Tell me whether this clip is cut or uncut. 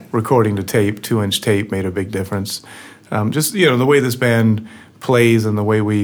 uncut